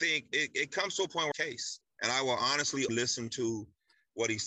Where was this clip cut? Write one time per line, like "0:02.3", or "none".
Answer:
0:01.3
0:02.9